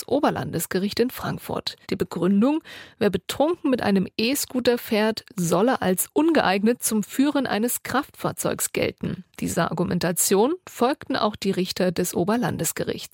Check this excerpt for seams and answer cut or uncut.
cut